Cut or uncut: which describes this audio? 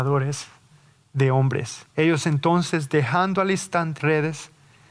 cut